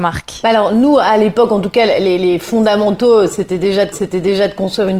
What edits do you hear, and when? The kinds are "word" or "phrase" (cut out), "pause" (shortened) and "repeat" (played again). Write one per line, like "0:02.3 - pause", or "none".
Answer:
0:03.9 - repeat

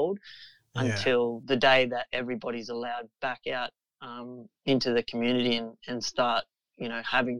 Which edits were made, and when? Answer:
none

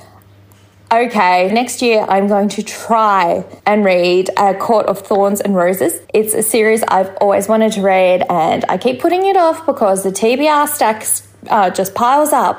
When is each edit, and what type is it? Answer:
0:01.5 - word
0:03.6 - pause
0:06.0 - pause

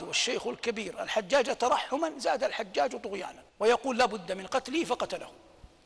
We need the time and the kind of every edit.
0:03.5 - pause

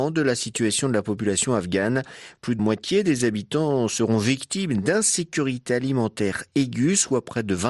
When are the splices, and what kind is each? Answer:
0:02.6 - word

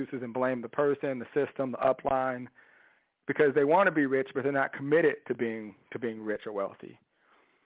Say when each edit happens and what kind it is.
none

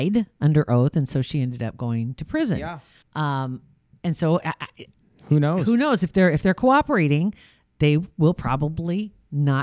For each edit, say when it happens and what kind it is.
0:03.0 - pause

